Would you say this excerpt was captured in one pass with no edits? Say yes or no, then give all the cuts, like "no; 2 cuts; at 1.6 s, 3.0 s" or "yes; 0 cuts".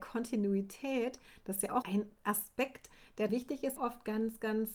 no; 3 cuts; at 1.8 s, 3.3 s, 3.8 s